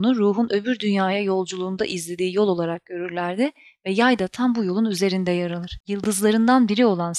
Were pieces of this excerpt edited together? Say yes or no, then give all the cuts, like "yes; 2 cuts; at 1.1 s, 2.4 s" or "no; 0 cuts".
no; 0 cuts